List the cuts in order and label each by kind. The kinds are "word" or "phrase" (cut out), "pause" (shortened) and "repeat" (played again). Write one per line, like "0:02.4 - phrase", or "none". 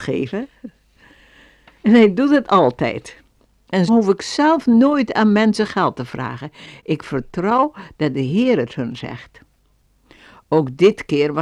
0:03.9 - word